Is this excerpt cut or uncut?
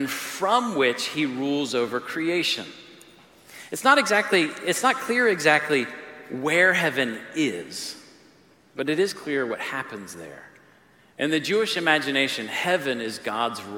uncut